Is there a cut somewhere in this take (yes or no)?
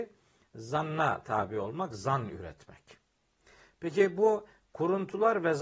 no